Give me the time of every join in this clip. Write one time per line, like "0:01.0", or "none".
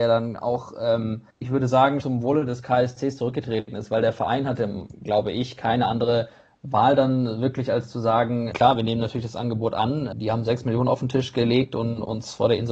0:01.3
0:02.0
0:08.5
0:10.1